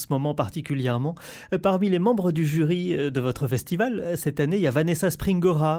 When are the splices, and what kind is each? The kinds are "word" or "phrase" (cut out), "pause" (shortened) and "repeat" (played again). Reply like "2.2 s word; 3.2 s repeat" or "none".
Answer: none